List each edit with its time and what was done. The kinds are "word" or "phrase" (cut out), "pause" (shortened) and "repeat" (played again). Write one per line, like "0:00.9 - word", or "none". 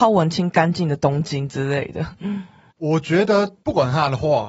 0:02.7 - word